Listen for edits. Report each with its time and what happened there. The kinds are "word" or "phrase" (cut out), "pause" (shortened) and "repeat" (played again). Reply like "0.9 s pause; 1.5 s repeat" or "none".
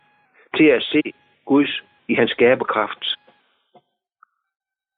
none